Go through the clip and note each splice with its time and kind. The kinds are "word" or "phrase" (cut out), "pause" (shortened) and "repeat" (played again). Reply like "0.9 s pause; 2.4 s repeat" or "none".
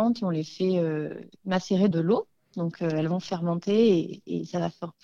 1.9 s word